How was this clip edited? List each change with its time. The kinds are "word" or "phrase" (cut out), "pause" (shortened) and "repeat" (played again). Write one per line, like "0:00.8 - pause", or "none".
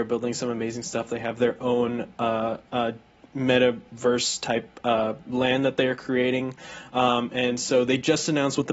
0:02.7 - pause